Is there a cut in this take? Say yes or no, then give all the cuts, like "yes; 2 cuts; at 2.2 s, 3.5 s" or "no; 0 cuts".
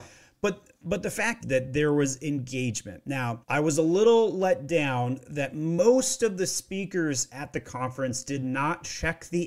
yes; 2 cuts; at 1.4 s, 3.4 s